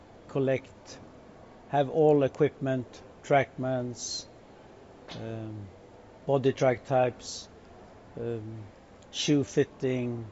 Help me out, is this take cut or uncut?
uncut